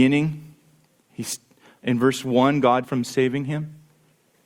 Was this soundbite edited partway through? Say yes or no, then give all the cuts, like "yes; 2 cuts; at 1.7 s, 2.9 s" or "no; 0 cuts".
yes; 1 cut; at 2.8 s